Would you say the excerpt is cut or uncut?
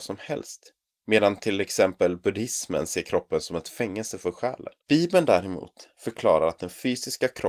cut